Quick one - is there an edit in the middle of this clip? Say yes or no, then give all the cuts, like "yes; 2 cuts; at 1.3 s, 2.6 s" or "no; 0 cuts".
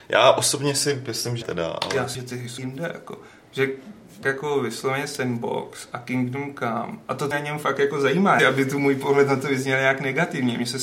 yes; 6 cuts; at 1.4 s, 2.1 s, 2.6 s, 4.2 s, 7.3 s, 8.4 s